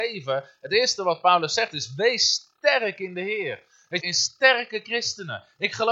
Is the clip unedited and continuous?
no; 1 cut; at 4.0 s

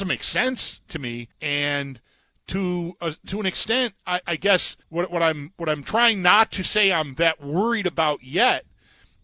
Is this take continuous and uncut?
no; 3 cuts; at 1.3 s, 4.2 s, 4.8 s

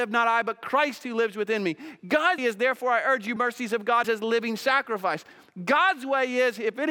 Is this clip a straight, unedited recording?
no; 3 cuts; at 2.4 s, 3.4 s, 4.0 s

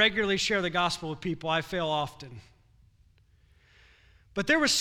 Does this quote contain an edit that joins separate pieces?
no; 0 cuts

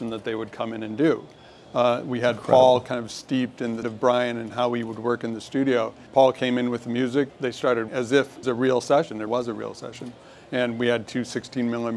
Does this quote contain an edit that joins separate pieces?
yes; 6 cuts; at 3.8 s, 6.1 s, 7.3 s, 7.9 s, 8.4 s, 9.3 s

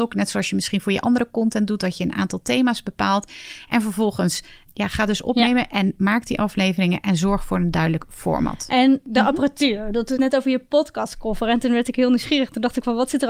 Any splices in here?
yes; 2 cuts; at 4.7 s, 10.2 s

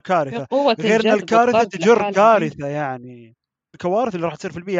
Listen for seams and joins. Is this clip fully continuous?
no; 1 cut; at 3.7 s

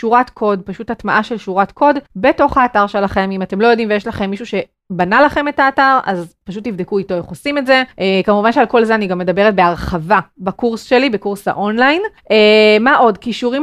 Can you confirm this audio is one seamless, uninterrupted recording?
no; 3 cuts; at 2.1 s, 7.9 s, 12.2 s

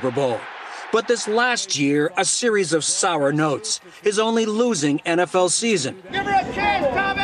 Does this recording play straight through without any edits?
yes; 0 cuts

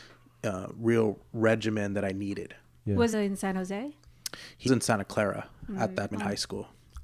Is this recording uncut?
no; 3 cuts; at 3.1 s, 4.7 s, 6.1 s

